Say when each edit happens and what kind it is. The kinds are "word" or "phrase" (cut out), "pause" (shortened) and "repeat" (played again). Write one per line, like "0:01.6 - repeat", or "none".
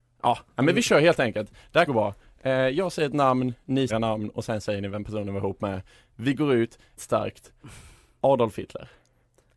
0:01.9 - word
0:03.9 - word
0:07.0 - word